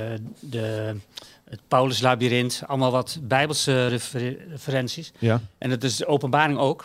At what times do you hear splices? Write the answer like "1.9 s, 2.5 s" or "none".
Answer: none